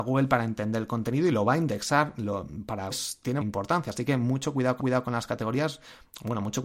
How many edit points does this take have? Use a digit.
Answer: 3